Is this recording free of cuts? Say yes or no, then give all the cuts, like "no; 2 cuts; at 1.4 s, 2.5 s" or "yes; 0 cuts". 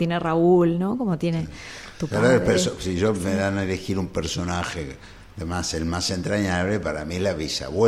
yes; 0 cuts